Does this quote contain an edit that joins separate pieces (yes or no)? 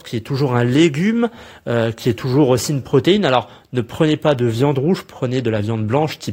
no